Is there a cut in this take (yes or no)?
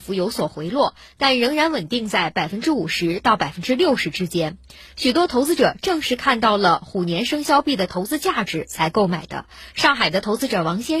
no